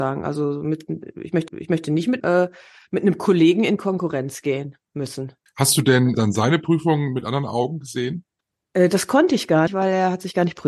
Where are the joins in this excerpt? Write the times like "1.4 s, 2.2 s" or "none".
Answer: 1.5 s, 2.2 s, 5.5 s, 6.1 s, 8.4 s, 9.7 s